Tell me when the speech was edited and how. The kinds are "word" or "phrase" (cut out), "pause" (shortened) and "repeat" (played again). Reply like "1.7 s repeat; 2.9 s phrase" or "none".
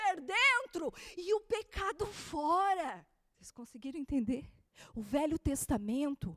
none

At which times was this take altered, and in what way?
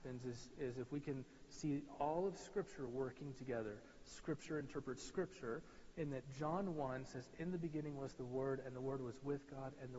none

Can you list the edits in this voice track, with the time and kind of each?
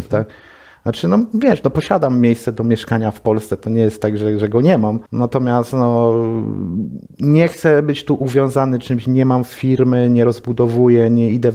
5.1 s pause; 7.1 s pause

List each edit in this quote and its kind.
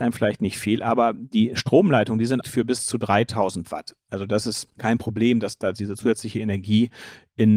2.4 s word

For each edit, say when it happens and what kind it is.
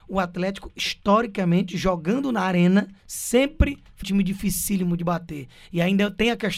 3.0 s pause; 4.0 s word

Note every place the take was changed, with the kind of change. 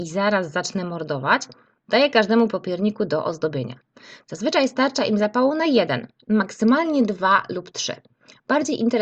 none

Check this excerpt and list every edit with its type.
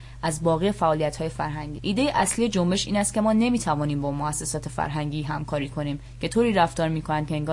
1.8 s word

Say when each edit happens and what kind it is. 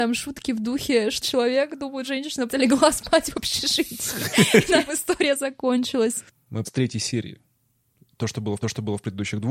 1.2 s phrase; 2.1 s word; 2.5 s word; 4.9 s word; 6.6 s word; 8.6 s repeat

